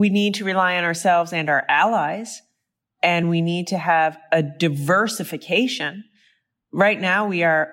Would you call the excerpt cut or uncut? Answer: uncut